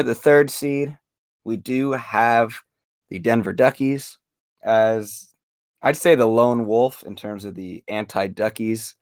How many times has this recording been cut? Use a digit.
0